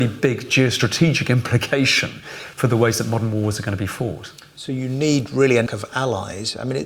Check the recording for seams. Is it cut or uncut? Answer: cut